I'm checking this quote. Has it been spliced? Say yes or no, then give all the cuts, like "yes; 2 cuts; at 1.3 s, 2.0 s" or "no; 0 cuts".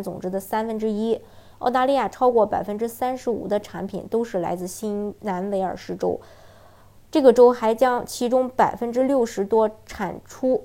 no; 0 cuts